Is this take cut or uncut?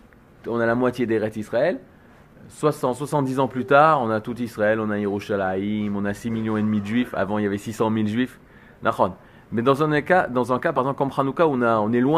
uncut